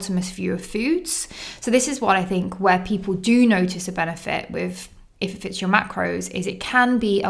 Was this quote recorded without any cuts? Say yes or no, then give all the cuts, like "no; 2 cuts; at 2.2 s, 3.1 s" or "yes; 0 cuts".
yes; 0 cuts